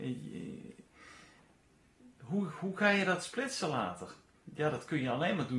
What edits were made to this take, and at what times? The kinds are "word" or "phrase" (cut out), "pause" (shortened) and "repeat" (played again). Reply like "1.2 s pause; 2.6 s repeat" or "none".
none